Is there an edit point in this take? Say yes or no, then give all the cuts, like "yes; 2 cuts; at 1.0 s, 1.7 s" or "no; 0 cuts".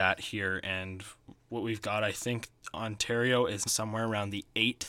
yes; 1 cut; at 3.7 s